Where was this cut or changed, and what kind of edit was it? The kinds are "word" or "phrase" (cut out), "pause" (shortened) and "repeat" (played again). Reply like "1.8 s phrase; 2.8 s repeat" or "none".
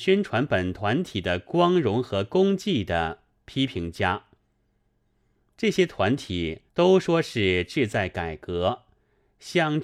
6.7 s pause